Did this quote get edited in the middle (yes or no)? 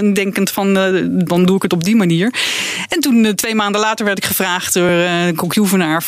no